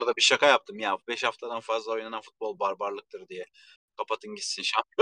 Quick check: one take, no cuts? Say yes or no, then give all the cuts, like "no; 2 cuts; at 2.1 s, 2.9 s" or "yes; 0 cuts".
yes; 0 cuts